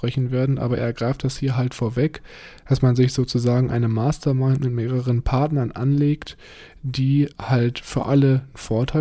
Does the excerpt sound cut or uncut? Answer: cut